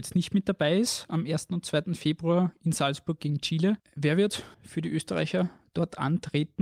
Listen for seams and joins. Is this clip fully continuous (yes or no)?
no